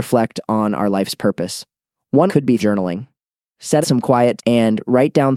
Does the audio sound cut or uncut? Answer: cut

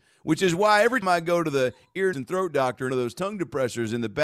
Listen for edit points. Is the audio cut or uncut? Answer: cut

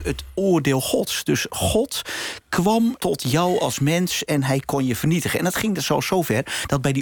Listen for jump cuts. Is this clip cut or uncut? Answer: cut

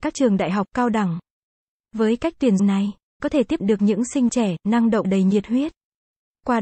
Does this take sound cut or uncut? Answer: cut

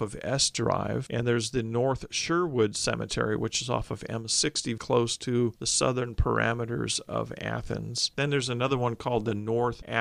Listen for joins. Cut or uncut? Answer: cut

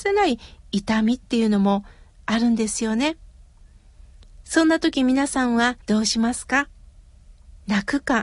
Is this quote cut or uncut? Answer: cut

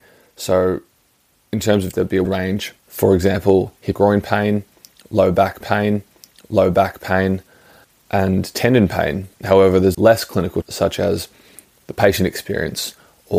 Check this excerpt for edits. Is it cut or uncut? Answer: cut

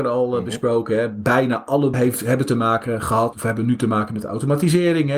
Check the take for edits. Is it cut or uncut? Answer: cut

